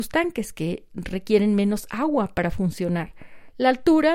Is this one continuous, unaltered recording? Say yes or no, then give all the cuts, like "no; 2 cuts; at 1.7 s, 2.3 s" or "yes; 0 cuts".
yes; 0 cuts